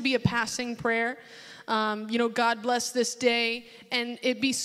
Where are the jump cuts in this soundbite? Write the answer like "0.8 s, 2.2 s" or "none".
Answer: none

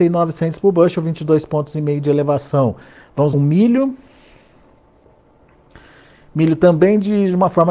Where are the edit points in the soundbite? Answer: 3.3 s

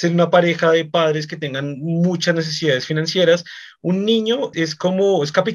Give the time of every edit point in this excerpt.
4.5 s

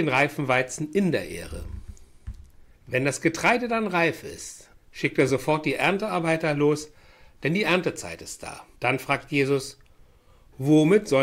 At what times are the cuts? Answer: 2.7 s, 4.7 s, 8.7 s

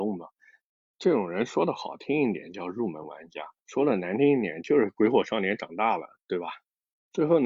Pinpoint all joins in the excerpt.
3.6 s

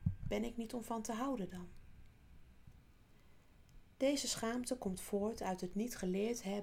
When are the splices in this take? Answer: none

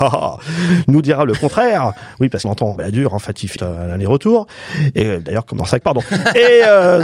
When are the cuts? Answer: 2.4 s, 2.8 s, 3.6 s, 5.8 s

